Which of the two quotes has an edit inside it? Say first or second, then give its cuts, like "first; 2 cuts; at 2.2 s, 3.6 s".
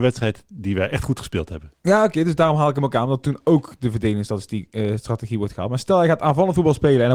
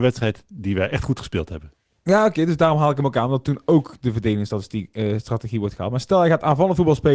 first; 1 cut; at 1.8 s